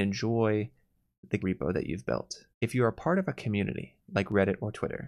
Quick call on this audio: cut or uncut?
cut